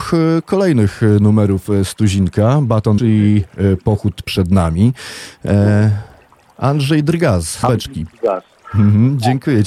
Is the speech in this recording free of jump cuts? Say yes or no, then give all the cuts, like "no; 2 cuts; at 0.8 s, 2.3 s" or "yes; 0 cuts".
no; 3 cuts; at 3.0 s, 4.2 s, 7.6 s